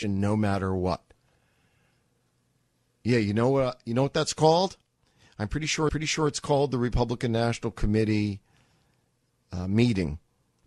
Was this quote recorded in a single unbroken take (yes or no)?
no